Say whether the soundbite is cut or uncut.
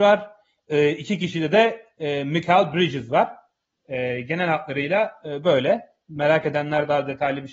uncut